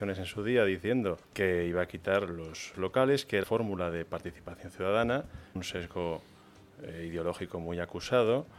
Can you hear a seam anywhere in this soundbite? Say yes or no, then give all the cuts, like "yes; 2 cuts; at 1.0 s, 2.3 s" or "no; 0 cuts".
yes; 4 cuts; at 1.2 s, 2.7 s, 3.4 s, 5.6 s